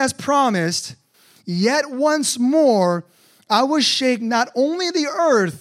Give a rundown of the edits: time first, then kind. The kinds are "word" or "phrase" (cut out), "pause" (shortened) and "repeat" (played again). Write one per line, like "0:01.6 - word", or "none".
none